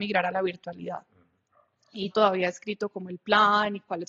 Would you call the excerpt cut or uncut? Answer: cut